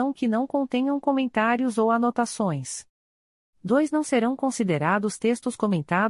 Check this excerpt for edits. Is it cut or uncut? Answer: uncut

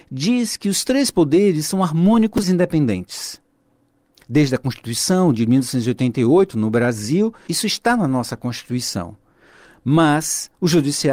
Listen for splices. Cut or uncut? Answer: cut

